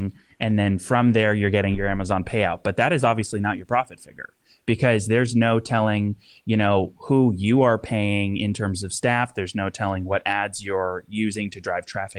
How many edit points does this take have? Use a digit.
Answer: 0